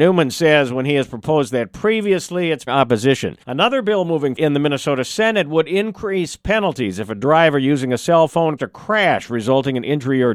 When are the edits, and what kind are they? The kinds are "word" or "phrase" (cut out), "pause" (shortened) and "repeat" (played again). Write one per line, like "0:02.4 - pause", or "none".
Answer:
0:02.7 - phrase
0:03.4 - pause
0:04.4 - word
0:08.6 - word